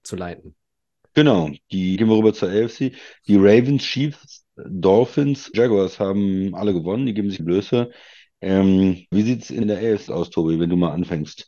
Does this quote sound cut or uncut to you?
cut